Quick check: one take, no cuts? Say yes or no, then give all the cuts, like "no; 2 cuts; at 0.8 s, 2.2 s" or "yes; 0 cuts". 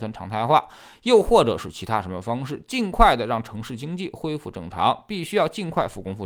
yes; 0 cuts